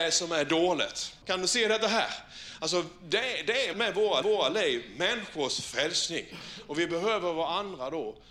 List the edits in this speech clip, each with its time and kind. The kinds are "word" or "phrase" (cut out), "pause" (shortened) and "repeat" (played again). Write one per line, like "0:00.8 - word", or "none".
0:01.2 - pause
0:03.7 - word
0:04.2 - repeat

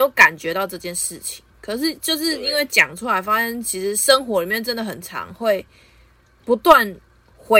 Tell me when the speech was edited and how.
none

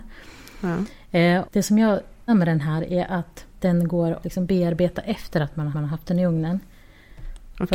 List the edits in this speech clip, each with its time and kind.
0:01.4 - word
0:02.3 - word
0:03.5 - pause
0:04.2 - word
0:05.7 - repeat

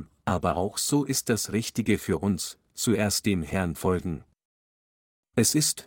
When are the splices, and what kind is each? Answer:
0:01.2 - word
0:03.7 - word

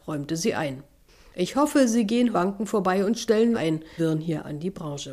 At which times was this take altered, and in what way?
0:02.3 - phrase
0:03.5 - word
0:04.0 - word

